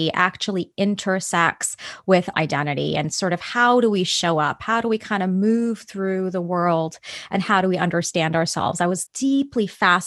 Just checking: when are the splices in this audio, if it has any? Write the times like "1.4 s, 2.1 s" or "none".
2.3 s, 9.1 s